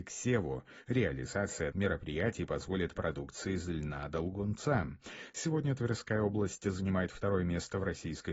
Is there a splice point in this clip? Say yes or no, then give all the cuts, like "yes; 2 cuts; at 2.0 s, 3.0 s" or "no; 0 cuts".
yes; 2 cuts; at 1.7 s, 3.0 s